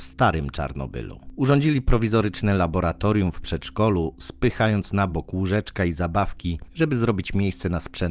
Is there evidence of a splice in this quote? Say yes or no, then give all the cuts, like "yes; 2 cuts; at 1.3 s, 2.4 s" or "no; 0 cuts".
no; 0 cuts